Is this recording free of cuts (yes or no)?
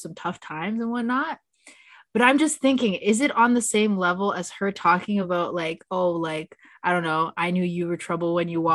yes